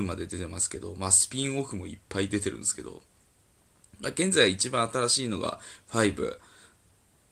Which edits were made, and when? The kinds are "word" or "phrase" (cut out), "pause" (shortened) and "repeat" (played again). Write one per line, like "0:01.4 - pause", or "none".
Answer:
none